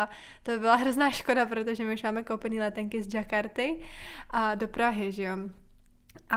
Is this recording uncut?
yes; 0 cuts

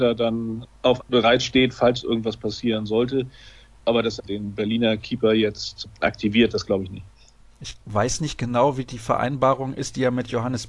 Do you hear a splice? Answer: yes; 2 cuts; at 1.0 s, 4.2 s

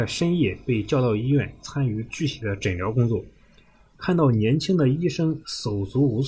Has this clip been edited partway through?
no; 0 cuts

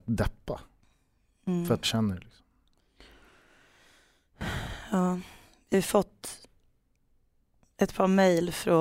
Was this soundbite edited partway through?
yes; 2 cuts; at 1.8 s, 5.7 s

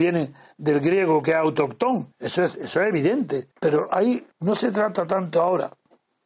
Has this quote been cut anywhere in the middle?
yes; 3 cuts; at 2.1 s, 3.5 s, 4.3 s

